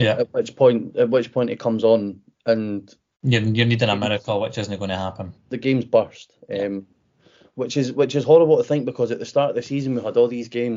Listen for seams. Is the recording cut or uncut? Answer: cut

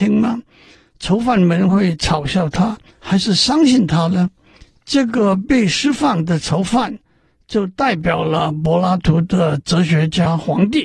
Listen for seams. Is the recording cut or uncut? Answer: uncut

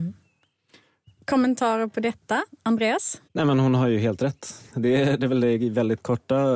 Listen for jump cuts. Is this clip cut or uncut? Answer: cut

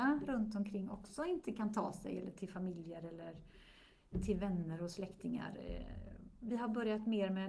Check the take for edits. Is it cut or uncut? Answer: uncut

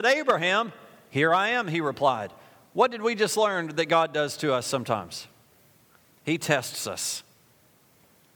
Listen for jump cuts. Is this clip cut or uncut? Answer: uncut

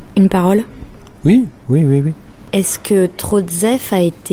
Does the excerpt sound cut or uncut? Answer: cut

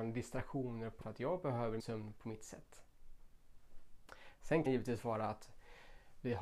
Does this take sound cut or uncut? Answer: cut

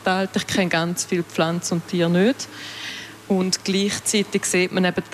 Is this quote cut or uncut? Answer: uncut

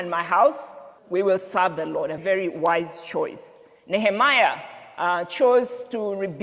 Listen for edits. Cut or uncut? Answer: cut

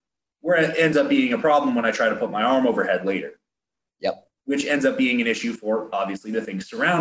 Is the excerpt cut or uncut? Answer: cut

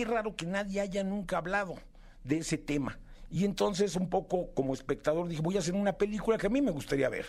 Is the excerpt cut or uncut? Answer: uncut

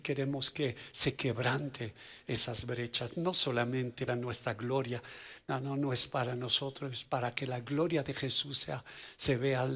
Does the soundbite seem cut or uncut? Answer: cut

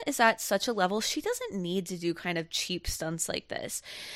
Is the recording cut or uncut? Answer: uncut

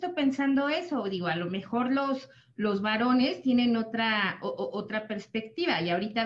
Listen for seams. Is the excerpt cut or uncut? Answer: uncut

